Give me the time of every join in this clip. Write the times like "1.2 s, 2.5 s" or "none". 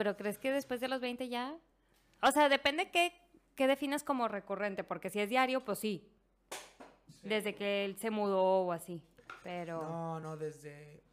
none